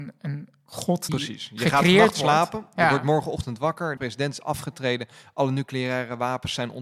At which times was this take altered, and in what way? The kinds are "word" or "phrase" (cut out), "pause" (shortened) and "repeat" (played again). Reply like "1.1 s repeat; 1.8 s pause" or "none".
1.1 s word; 4.0 s word